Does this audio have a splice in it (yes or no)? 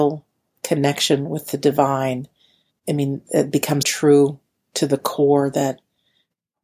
yes